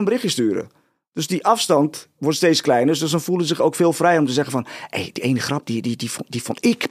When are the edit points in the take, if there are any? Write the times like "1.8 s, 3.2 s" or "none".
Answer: none